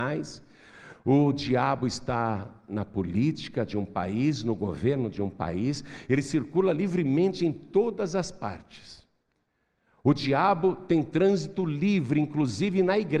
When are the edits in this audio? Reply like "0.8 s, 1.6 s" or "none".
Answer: none